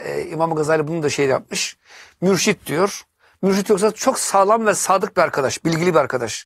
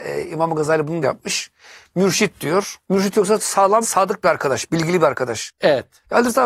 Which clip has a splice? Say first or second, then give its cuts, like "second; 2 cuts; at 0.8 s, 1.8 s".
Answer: second; 4 cuts; at 1.0 s, 2.8 s, 3.4 s, 3.8 s